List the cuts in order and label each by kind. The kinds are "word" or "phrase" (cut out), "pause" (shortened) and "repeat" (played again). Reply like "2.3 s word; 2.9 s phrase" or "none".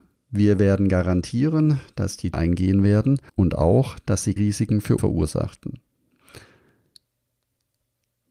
2.3 s phrase; 3.3 s pause; 4.4 s word; 5.0 s word